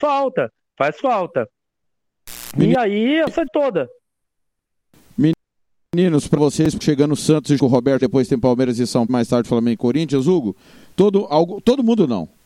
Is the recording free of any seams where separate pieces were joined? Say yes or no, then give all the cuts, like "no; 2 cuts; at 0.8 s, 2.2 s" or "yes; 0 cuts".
no; 6 cuts; at 3.5 s, 6.4 s, 6.8 s, 7.6 s, 8.0 s, 9.1 s